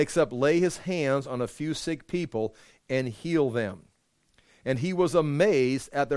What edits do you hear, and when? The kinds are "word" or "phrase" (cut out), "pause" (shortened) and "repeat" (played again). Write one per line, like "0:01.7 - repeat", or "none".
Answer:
none

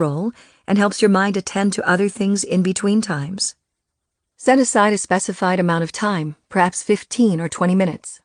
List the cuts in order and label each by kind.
none

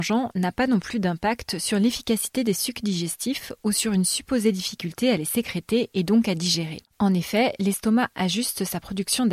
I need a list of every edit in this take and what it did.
0:06.9 - pause

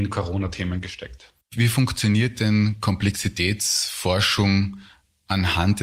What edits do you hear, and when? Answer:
0:01.4 - pause

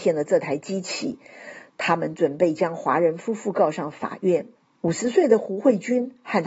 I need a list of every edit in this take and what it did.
0:04.5 - pause

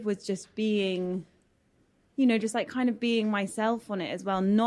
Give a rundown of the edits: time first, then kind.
none

